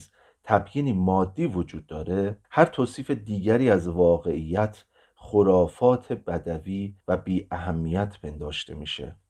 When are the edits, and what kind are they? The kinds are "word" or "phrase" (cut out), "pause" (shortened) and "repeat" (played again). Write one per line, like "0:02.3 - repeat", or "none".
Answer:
0:02.4 - pause
0:07.0 - pause

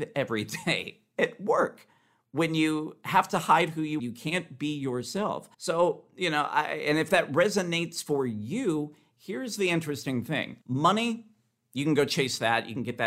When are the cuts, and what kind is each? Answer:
0:04.0 - phrase
0:05.5 - pause
0:10.6 - pause

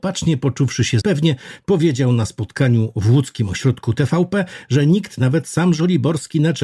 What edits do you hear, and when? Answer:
0:01.0 - word

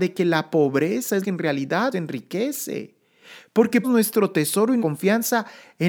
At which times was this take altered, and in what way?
0:01.2 - word
0:01.9 - word
0:03.8 - word
0:04.8 - word

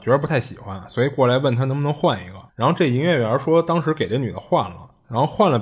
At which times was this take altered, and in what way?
0:02.5 - pause

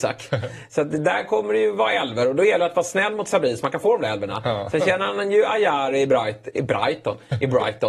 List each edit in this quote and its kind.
none

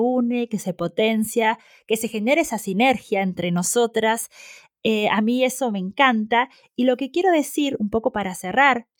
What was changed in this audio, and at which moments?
none

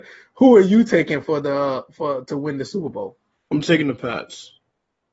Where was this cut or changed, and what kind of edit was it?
none

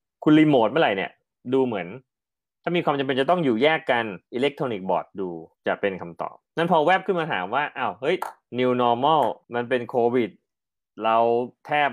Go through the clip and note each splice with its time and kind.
0:04.3 - pause
0:05.5 - pause
0:06.4 - pause
0:09.4 - pause

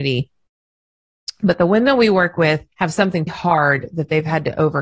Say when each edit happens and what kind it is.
0:02.7 - pause
0:03.3 - word

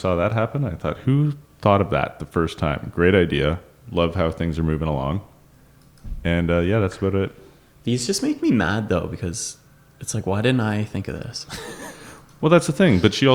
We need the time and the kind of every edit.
none

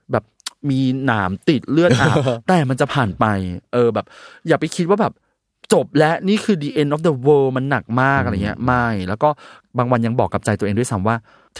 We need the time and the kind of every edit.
none

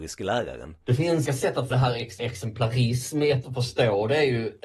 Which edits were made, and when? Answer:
0:01.3 - word
0:01.7 - word
0:02.2 - word
0:03.4 - word

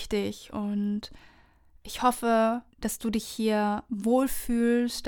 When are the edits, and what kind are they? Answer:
0:02.7 - pause

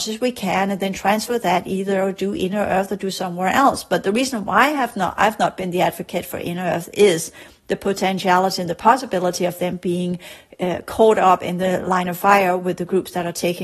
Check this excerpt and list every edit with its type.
none

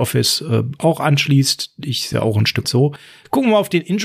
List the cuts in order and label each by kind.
0:02.1 - word
0:02.6 - word

